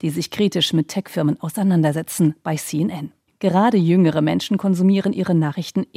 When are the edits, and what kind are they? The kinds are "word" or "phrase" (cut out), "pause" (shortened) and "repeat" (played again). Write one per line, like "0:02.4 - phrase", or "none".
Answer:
none